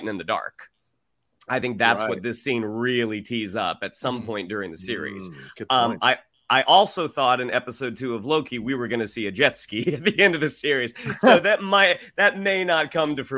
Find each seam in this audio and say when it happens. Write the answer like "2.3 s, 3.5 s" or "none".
none

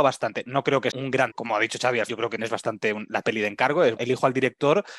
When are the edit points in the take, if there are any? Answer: 0.9 s, 1.3 s, 2.1 s, 2.4 s, 3.2 s, 4.0 s

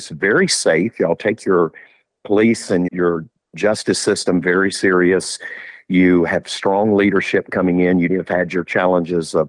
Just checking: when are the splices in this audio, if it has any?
2.9 s, 8.1 s

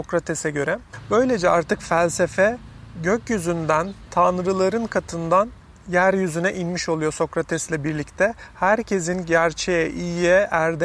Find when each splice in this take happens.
none

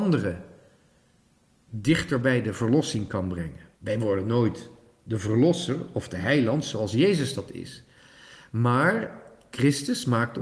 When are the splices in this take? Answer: 3.7 s

